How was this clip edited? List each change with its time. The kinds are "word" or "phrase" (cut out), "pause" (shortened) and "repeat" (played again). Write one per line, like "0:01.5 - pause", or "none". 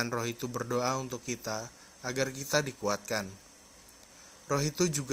none